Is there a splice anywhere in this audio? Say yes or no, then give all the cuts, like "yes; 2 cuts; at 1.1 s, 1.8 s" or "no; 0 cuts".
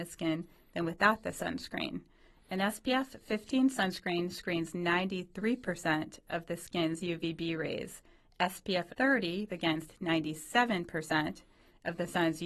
yes; 2 cuts; at 8.9 s, 9.5 s